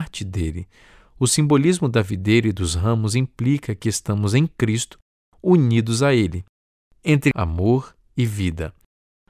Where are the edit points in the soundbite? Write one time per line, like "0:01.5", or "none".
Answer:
none